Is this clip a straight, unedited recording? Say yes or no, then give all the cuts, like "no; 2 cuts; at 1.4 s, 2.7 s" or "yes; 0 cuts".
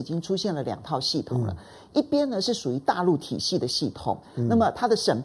yes; 0 cuts